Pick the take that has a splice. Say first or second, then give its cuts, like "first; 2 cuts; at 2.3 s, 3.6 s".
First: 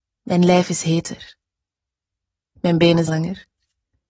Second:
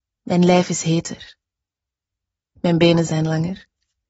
first; 1 cut; at 3.1 s